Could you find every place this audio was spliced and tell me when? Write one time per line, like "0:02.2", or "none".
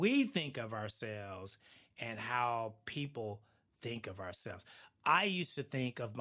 none